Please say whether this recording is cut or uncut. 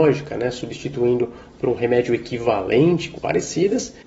cut